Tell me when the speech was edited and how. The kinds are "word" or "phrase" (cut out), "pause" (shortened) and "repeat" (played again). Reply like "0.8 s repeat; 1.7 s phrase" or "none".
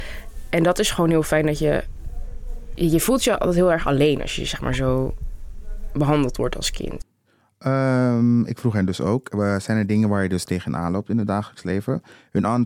none